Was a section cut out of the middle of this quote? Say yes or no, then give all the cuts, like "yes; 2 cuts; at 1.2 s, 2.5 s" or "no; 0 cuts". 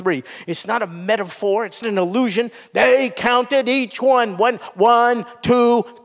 yes; 1 cut; at 1.8 s